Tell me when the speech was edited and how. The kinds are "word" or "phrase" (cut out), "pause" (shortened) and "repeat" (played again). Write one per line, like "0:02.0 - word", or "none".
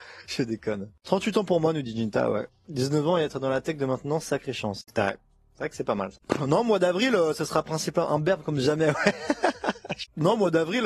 none